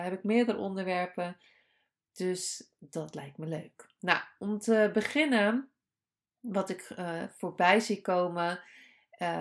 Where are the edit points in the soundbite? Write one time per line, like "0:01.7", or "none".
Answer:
none